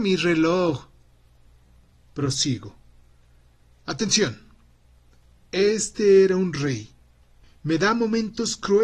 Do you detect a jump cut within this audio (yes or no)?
no